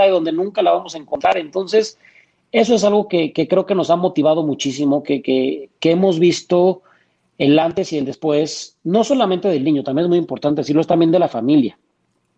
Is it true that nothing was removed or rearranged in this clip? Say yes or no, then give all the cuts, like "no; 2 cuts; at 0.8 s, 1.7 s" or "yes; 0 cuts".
yes; 0 cuts